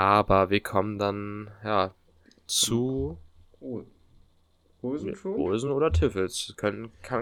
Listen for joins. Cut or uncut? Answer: uncut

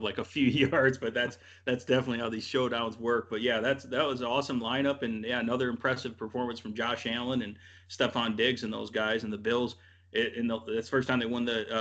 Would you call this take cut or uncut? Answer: uncut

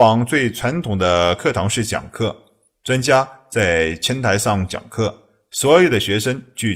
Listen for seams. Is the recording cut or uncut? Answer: uncut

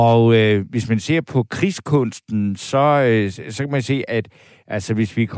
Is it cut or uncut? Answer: uncut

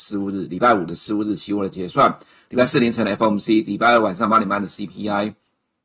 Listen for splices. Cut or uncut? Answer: uncut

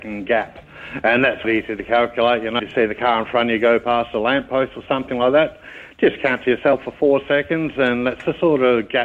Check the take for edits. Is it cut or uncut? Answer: cut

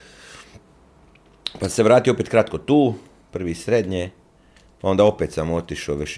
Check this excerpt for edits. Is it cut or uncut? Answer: uncut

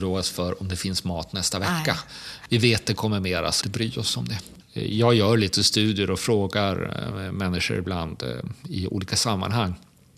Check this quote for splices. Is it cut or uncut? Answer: cut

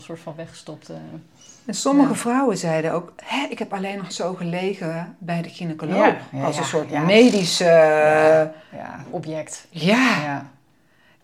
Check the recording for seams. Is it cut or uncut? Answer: uncut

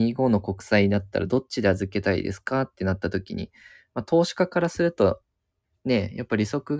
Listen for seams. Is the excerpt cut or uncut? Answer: uncut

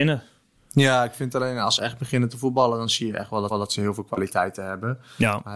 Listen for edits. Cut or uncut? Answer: cut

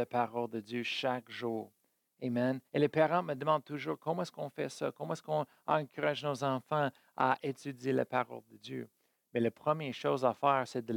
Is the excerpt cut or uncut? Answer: cut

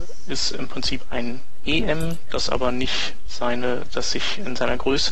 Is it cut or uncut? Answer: uncut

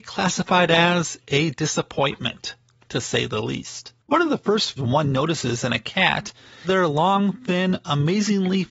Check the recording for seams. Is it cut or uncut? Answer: cut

